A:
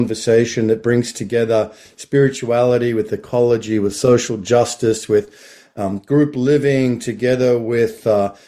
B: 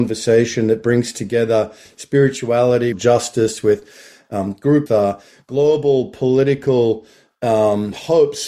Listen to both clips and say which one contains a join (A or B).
B